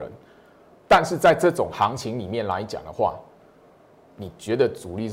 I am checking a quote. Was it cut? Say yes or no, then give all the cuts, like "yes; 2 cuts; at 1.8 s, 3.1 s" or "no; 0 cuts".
no; 0 cuts